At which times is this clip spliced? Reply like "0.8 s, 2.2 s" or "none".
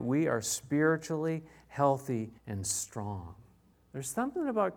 2.4 s, 3.7 s

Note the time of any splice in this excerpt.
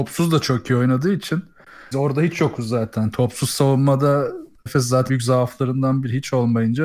1.9 s, 4.7 s, 5.1 s

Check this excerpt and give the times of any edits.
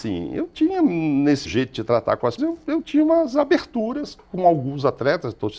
1.4 s, 2.4 s

